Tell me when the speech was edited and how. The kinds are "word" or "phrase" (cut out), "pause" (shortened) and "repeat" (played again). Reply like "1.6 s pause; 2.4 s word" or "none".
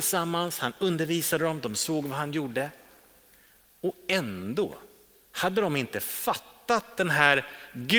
none